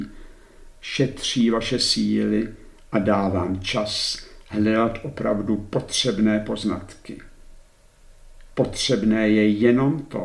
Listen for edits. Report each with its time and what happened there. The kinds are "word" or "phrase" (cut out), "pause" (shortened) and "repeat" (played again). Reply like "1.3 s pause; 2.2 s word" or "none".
none

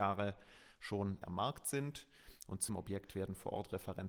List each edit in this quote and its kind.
1.2 s word; 2.7 s word

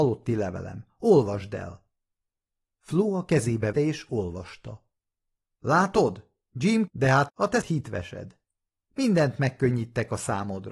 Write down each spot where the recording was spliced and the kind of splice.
3.7 s word; 6.9 s word; 7.3 s phrase; 7.6 s word

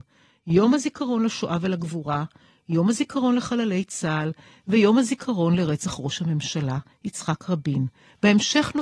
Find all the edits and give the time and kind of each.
none

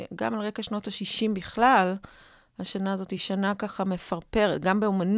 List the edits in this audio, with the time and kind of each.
none

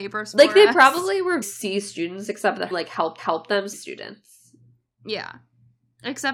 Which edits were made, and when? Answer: 1.4 s word; 2.7 s word; 3.2 s repeat; 3.7 s phrase

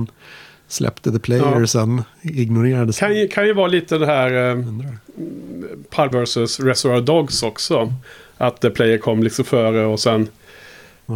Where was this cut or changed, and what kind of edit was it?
6.1 s word

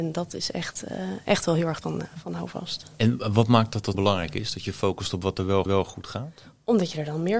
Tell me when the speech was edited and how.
1.8 s phrase; 3.9 s word; 5.7 s repeat

